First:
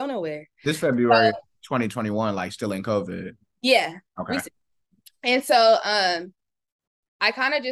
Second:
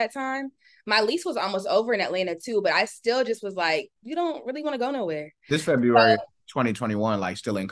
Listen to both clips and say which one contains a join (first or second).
second